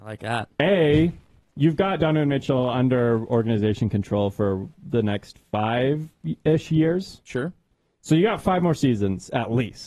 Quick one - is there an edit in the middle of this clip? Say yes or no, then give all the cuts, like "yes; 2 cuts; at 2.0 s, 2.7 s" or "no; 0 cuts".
no; 0 cuts